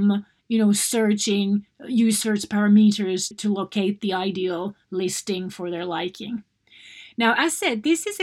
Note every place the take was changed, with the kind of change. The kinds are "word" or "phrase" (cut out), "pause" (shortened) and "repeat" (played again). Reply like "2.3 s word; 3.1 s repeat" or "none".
3.3 s word